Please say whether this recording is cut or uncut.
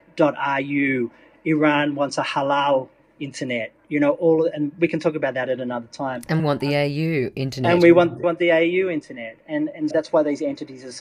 cut